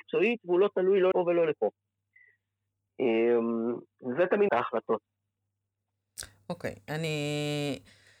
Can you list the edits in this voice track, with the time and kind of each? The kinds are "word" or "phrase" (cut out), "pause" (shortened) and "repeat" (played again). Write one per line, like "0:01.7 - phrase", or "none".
0:01.1 - word
0:04.5 - phrase

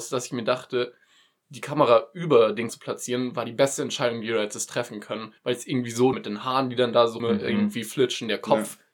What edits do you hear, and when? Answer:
0:01.4 - word
0:02.7 - word
0:05.4 - pause
0:06.1 - phrase
0:07.2 - word

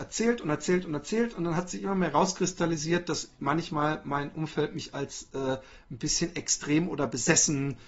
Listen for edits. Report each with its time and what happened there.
none

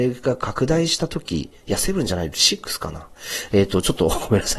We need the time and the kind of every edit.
0:01.6 - pause

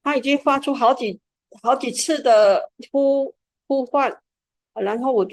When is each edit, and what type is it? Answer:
none

